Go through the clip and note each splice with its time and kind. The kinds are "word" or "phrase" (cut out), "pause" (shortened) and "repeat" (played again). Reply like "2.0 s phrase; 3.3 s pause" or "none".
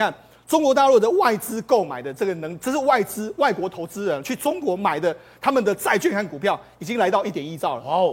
none

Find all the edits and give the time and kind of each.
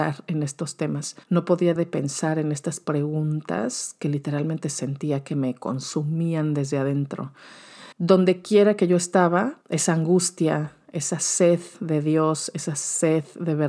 1.2 s pause; 1.8 s word; 7.9 s pause; 9.6 s pause

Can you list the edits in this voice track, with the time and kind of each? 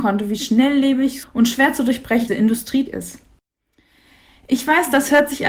1.2 s word; 2.3 s word; 2.9 s word

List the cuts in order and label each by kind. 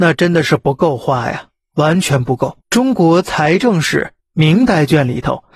2.6 s pause

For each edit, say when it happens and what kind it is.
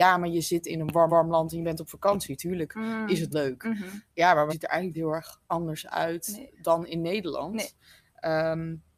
1.1 s repeat; 3.3 s word; 4.1 s pause; 4.5 s word; 4.9 s word; 5.4 s pause

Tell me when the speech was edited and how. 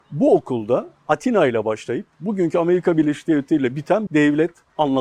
4.1 s phrase

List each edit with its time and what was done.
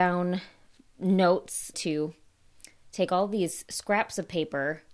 1.7 s phrase

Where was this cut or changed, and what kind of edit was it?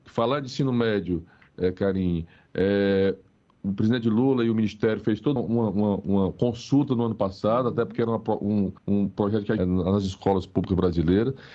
5.4 s word; 8.8 s pause; 9.6 s phrase

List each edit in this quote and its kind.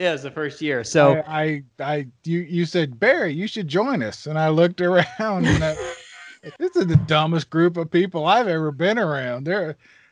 6.6 s pause

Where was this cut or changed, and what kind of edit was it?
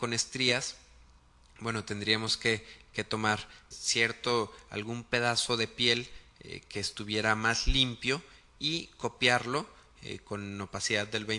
3.7 s word

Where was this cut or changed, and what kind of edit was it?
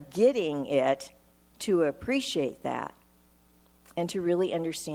none

